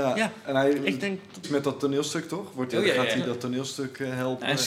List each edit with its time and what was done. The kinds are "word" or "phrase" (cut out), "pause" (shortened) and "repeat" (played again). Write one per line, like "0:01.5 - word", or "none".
0:01.4 - word
0:02.7 - word